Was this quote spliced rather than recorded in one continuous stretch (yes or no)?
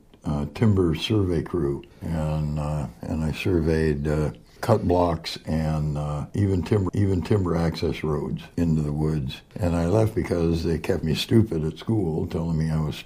yes